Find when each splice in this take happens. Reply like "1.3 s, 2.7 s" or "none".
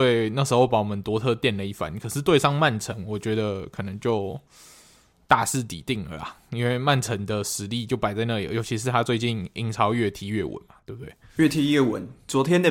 none